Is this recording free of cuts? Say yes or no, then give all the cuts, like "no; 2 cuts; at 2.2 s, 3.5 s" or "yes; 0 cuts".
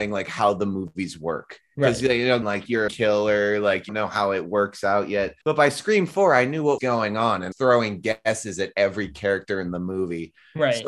no; 6 cuts; at 2.4 s, 2.9 s, 3.9 s, 5.4 s, 6.8 s, 7.5 s